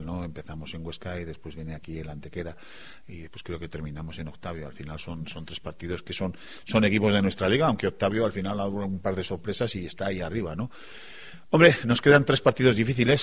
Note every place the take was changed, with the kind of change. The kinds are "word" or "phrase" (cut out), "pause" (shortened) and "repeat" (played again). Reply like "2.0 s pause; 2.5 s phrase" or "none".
none